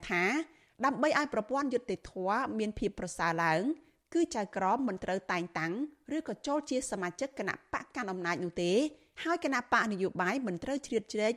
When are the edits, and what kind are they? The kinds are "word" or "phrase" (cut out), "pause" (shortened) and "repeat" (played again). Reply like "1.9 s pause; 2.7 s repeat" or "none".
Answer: none